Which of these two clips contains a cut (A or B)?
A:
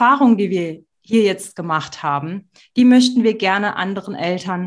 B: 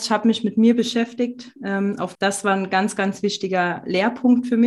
B